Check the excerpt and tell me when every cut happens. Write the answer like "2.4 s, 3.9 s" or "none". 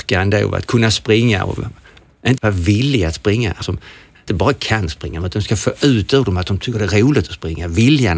2.4 s, 3.6 s, 4.3 s